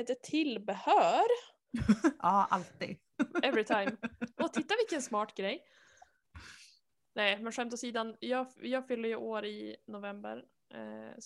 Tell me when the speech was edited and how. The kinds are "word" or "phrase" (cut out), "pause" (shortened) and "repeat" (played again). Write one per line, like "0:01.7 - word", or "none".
none

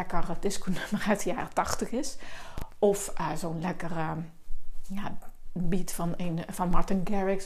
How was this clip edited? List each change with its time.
none

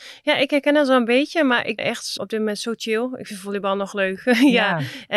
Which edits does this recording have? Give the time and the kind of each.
0:01.8 - word
0:02.2 - word

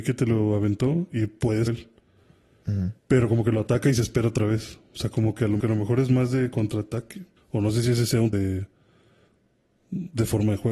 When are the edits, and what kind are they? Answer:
0:01.7 - word
0:03.0 - pause
0:05.6 - phrase
0:07.4 - pause
0:08.3 - word

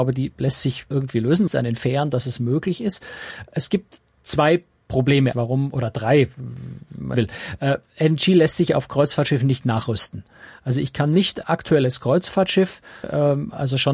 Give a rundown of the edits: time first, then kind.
0:00.9 - word
0:01.5 - word
0:05.3 - word
0:07.1 - word
0:11.4 - word
0:13.0 - word

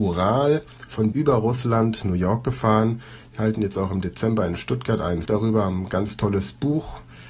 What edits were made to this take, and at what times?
0:01.1 - word
0:02.0 - word
0:05.3 - word

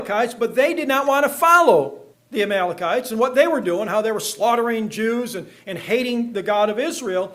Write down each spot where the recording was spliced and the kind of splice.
0:02.1 - pause

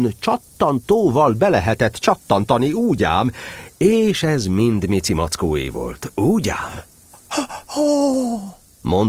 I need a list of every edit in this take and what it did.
0:07.6 - pause

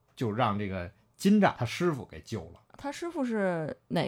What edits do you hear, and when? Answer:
0:02.7 - pause

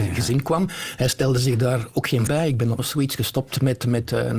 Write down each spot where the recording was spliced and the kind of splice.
0:02.3 - word
0:02.8 - phrase

